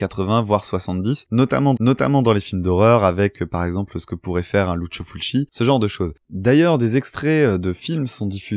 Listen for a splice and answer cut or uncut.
cut